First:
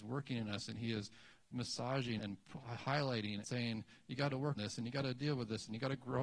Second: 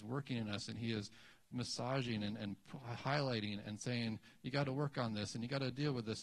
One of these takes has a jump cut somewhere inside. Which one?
first; 3 cuts; at 2.2 s, 3.4 s, 4.6 s

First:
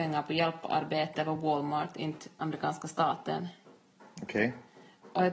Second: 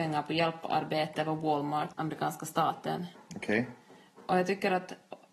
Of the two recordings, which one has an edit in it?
second; 2 cuts; at 1.9 s, 3.1 s

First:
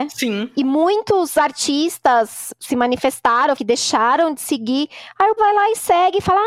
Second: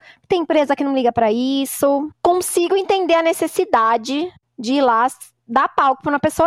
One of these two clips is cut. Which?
first; 2 cuts; at 3.5 s, 5.4 s

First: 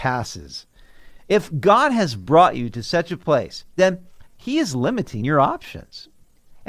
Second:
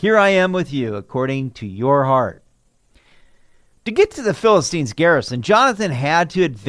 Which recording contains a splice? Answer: first; 1 cut; at 4.3 s

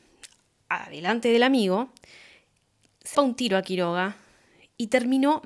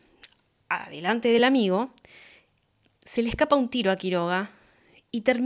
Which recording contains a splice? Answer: first; 1 cut; at 3.1 s

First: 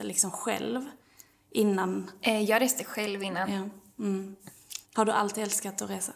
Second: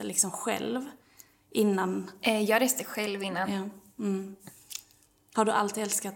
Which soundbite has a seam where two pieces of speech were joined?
first; 1 cut; at 4.8 s

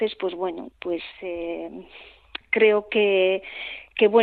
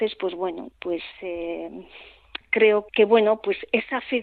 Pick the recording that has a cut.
second; 1 cut; at 2.9 s

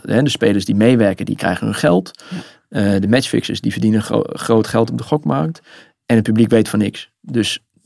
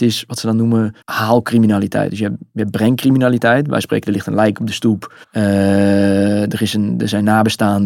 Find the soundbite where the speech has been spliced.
second; 2 cuts; at 1.0 s, 5.2 s

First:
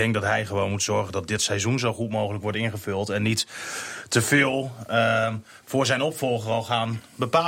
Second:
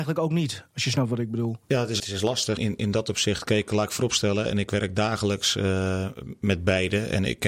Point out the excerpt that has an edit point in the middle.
second; 3 cuts; at 1.6 s, 2.0 s, 2.6 s

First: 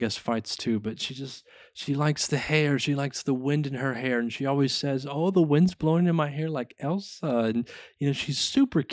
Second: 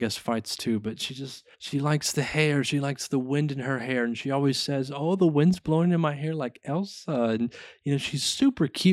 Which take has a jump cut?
second; 1 cut; at 1.5 s

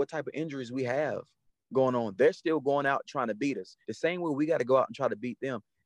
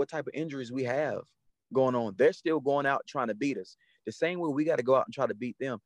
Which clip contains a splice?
first; 1 cut; at 3.8 s

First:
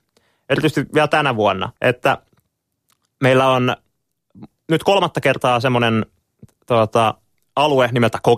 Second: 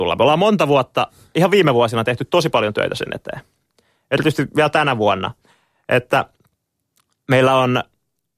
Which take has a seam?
first; 1 cut; at 1.8 s

